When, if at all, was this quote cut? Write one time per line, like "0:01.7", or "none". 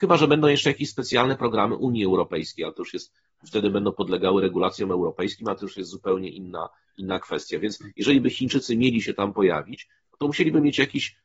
none